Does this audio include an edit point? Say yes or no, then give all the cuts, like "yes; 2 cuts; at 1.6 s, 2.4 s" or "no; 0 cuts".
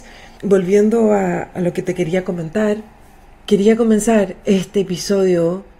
no; 0 cuts